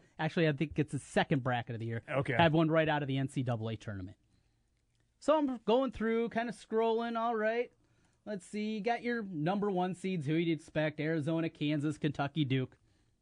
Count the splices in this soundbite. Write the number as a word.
zero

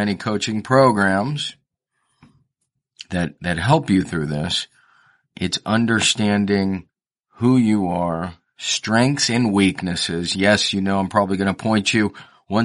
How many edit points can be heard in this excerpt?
zero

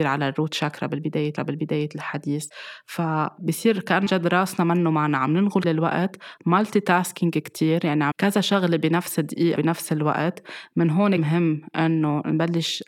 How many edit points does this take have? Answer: six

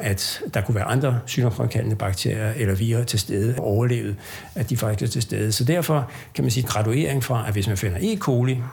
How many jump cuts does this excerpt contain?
two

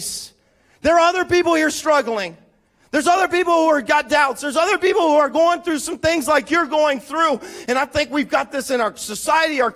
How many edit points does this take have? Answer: zero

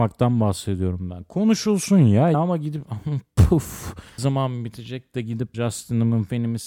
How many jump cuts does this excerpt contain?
three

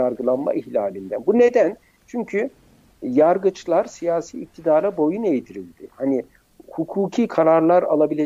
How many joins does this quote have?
zero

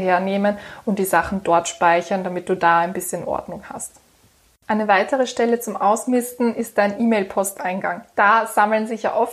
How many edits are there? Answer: zero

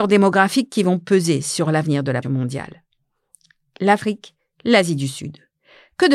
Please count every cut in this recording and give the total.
one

